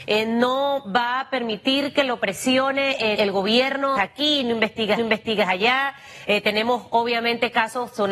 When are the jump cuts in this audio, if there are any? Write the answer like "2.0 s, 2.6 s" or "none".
3.1 s, 4.0 s, 5.0 s